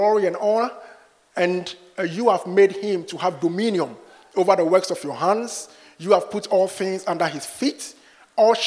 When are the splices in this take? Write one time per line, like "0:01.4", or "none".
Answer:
none